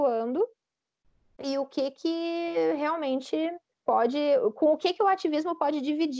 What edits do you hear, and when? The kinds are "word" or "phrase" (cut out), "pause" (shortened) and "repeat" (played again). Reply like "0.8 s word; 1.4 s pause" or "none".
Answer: 3.7 s pause